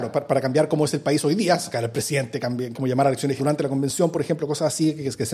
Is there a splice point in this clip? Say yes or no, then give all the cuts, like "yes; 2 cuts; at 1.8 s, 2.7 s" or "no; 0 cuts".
yes; 2 cuts; at 2.7 s, 3.4 s